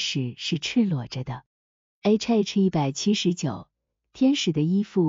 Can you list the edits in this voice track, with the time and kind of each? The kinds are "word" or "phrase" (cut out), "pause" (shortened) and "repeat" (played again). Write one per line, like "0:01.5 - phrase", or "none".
none